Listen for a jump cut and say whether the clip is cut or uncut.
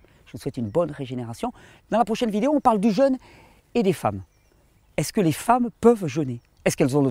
uncut